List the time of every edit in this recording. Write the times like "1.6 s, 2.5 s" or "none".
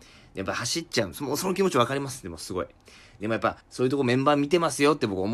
3.6 s